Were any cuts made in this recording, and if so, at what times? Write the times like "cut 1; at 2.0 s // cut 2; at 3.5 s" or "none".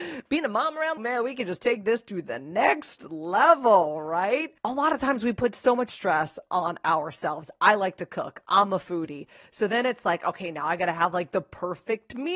cut 1; at 1.0 s // cut 2; at 4.6 s // cut 3; at 5.9 s